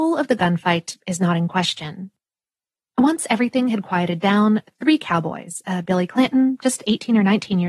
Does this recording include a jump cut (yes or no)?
no